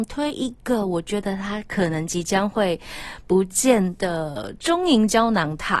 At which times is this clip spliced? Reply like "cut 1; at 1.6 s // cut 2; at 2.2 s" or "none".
none